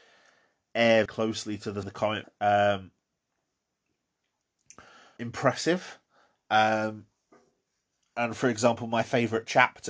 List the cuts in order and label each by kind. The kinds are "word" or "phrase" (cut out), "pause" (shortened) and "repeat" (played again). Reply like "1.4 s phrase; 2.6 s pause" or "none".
1.1 s word; 1.8 s word; 2.2 s word; 5.2 s word